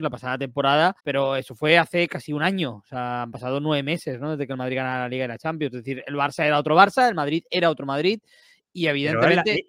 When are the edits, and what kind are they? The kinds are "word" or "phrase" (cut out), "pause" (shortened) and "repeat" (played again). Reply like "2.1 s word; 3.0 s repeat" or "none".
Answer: 1.0 s pause